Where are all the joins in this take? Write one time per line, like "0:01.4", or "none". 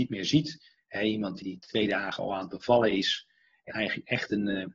0:03.7